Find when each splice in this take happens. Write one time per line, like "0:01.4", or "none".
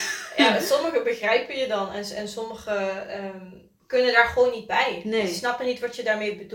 none